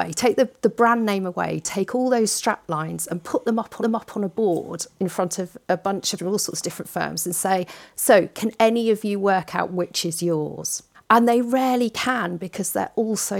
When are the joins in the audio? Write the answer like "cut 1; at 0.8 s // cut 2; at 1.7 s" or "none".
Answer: cut 1; at 3.8 s // cut 2; at 6.2 s // cut 3; at 10.9 s